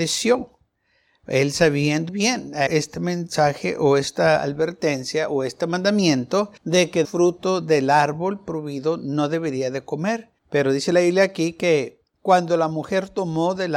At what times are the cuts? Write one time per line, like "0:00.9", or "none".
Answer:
0:02.1
0:02.7
0:06.6
0:07.0
0:10.4
0:12.1